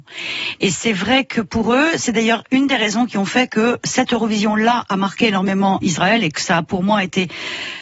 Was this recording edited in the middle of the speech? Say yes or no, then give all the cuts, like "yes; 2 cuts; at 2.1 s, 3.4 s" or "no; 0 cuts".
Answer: yes; 1 cut; at 5.8 s